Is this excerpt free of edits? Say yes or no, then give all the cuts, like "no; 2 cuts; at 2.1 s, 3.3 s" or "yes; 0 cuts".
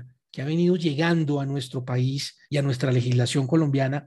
no; 1 cut; at 2.4 s